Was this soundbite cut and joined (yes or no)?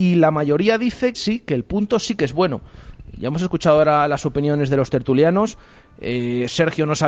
yes